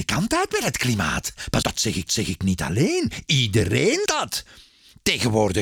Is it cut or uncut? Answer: cut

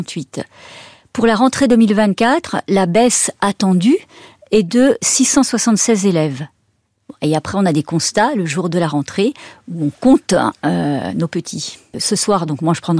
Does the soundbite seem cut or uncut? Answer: uncut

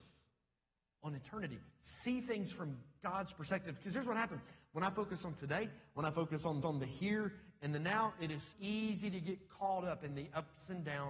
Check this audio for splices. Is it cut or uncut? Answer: cut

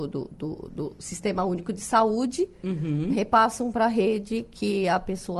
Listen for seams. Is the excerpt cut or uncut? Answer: uncut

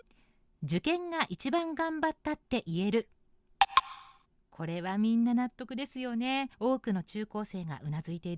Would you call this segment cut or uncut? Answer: cut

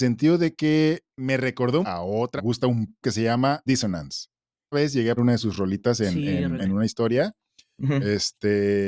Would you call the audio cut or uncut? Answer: cut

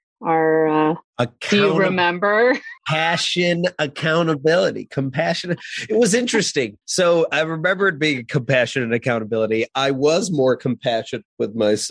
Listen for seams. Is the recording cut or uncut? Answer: cut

